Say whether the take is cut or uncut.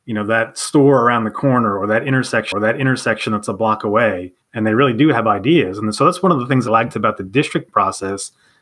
cut